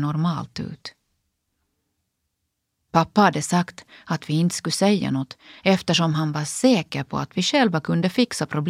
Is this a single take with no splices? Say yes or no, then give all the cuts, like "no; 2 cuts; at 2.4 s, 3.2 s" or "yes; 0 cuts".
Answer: yes; 0 cuts